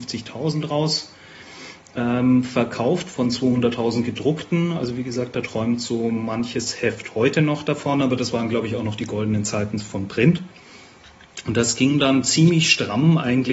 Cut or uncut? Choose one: uncut